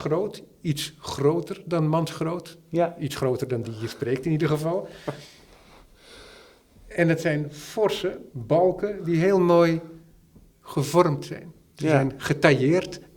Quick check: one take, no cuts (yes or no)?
no